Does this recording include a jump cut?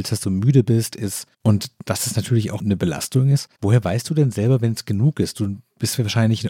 yes; 3 cuts; at 0.9 s, 1.3 s, 3.5 s

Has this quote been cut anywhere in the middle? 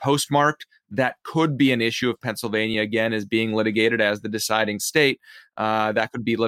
no; 0 cuts

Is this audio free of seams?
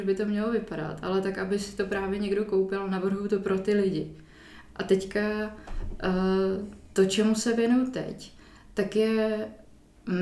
yes; 0 cuts

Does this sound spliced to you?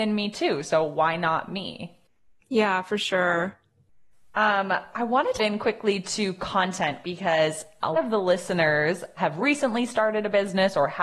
yes; 4 cuts; at 5.4 s, 7.0 s, 7.9 s, 9.2 s

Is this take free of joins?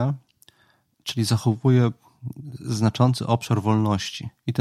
yes; 0 cuts

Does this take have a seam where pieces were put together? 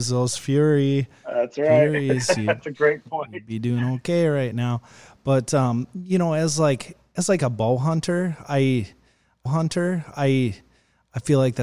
yes; 1 cut; at 9.5 s

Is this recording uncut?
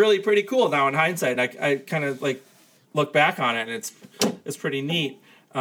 yes; 0 cuts

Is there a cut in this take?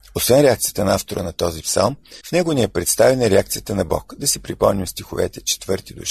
yes; 1 cut; at 2.2 s

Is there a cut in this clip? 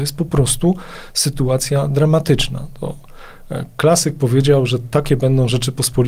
no; 0 cuts

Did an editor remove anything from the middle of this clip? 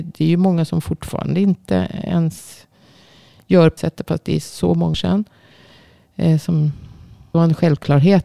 yes; 3 cuts; at 3.8 s, 4.9 s, 7.3 s

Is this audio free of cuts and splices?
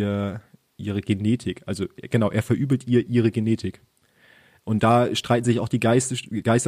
yes; 0 cuts

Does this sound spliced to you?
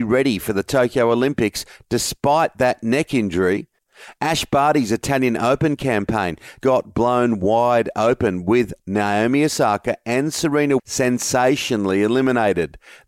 yes; 2 cuts; at 6.6 s, 10.8 s

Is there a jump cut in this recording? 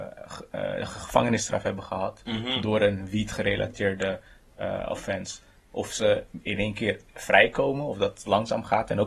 no; 0 cuts

